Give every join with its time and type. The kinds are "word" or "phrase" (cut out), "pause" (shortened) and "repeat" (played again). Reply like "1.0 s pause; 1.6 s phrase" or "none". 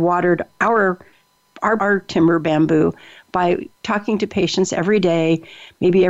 1.8 s word; 3.7 s pause